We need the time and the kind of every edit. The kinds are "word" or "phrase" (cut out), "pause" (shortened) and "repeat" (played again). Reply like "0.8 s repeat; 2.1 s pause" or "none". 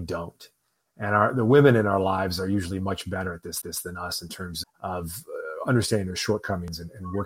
3.6 s repeat; 4.6 s word